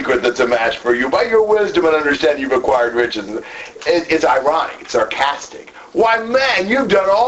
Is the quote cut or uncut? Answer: uncut